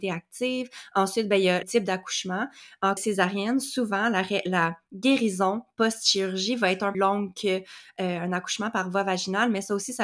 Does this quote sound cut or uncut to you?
cut